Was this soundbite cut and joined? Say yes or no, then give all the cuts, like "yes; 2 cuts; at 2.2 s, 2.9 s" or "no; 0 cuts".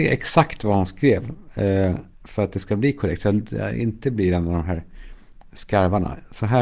yes; 1 cut; at 2.1 s